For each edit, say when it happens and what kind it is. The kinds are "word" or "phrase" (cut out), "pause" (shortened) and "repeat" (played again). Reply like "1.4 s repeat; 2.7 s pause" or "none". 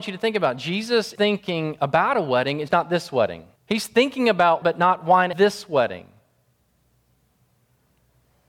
1.2 s word; 2.7 s word; 3.6 s pause; 4.6 s word; 5.3 s word